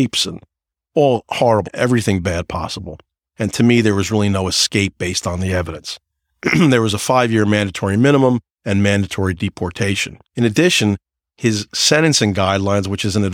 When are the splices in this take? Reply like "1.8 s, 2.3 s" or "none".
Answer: 1.6 s, 10.2 s